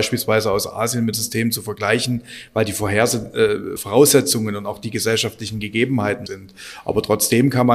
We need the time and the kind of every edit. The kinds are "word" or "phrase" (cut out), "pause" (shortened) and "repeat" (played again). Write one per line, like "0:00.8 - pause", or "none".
0:01.1 - word
0:03.8 - word
0:06.3 - word